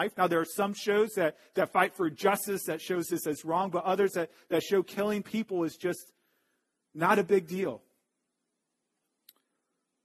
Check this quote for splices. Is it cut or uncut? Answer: uncut